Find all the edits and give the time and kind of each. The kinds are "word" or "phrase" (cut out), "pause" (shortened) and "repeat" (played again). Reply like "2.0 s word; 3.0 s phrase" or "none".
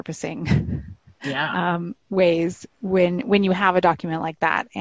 none